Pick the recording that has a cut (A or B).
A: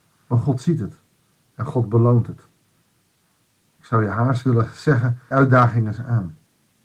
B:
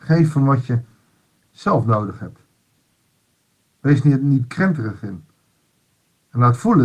A